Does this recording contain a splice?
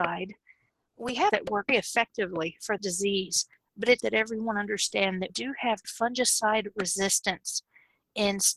yes; 6 cuts; at 1.3 s, 1.7 s, 2.8 s, 4.0 s, 5.3 s, 5.8 s

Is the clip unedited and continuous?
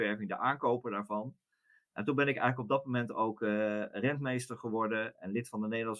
yes; 0 cuts

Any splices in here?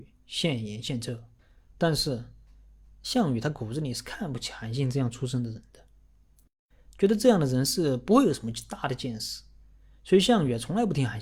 no; 0 cuts

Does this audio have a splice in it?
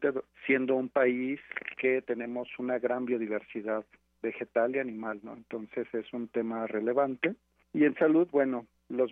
no; 0 cuts

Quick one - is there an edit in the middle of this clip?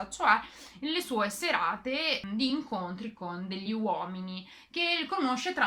no; 0 cuts

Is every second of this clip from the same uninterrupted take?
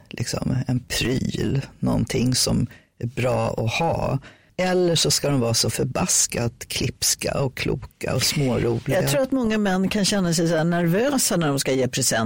yes; 0 cuts

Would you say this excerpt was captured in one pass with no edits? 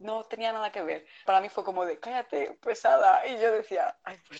no; 1 cut; at 1.3 s

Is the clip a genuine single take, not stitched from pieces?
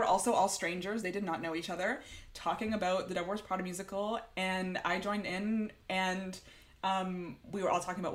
yes; 0 cuts

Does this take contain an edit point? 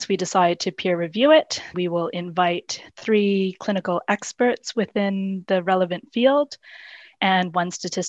yes; 1 cut; at 1.7 s

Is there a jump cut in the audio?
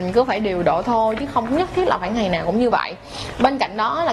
no; 0 cuts

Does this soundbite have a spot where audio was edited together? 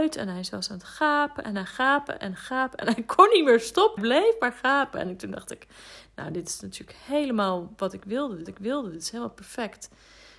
yes; 2 cuts; at 4.0 s, 8.5 s

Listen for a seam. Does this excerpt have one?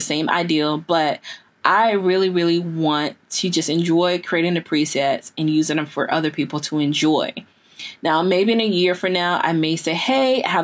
no; 0 cuts

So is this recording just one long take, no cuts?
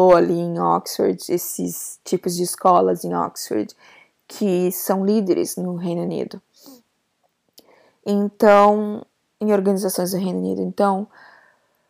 yes; 0 cuts

